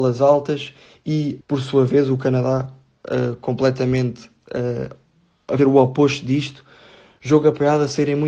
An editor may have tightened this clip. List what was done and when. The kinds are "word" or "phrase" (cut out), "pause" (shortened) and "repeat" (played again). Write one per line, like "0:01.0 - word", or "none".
0:01.4 - word
0:05.6 - word